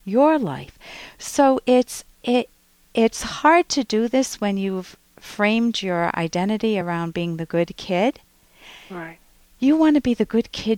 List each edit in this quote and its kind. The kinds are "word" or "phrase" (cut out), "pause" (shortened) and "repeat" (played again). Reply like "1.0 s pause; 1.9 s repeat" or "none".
none

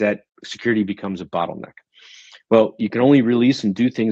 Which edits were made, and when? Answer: none

